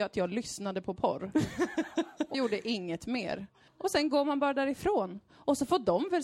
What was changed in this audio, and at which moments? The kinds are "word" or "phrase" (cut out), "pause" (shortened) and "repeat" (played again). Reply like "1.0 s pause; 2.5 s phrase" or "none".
2.3 s word; 3.7 s pause